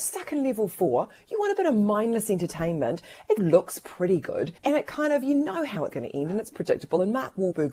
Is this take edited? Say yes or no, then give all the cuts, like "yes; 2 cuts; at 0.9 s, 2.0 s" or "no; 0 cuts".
yes; 4 cuts; at 3.4 s, 4.6 s, 5.9 s, 6.5 s